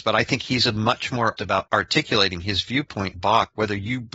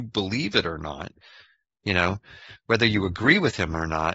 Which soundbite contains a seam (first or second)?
first